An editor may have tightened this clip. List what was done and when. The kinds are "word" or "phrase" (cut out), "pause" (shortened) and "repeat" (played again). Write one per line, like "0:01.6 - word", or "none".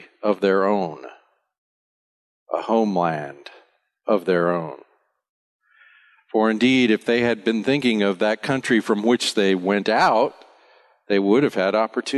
none